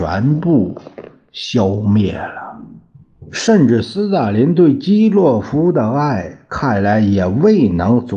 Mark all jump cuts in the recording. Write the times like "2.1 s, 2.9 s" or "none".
none

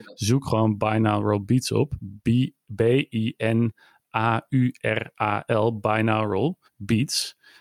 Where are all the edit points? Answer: 6.6 s

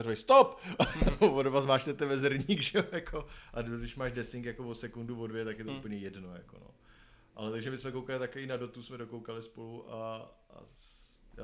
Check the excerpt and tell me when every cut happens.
none

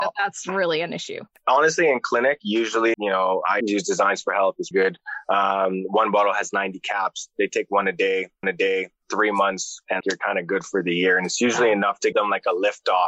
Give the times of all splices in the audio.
2.9 s, 3.6 s, 4.7 s, 8.4 s, 10.0 s, 12.1 s

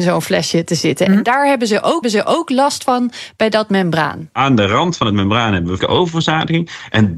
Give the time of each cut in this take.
2.0 s, 5.8 s

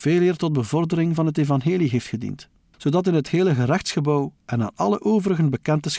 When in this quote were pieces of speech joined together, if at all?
4.4 s

